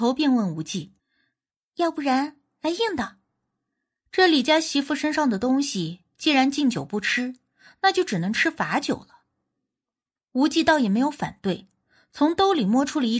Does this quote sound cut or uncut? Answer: cut